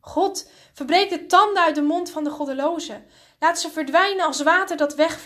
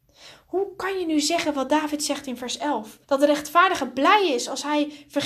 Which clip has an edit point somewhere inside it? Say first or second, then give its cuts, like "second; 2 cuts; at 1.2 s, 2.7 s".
second; 1 cut; at 3.0 s